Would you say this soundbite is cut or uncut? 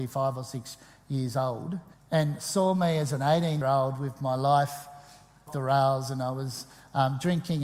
cut